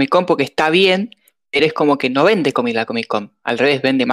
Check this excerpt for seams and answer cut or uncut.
uncut